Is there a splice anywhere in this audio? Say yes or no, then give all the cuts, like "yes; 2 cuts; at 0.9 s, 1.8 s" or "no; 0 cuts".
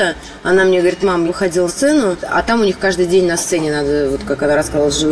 yes; 2 cuts; at 1.3 s, 1.7 s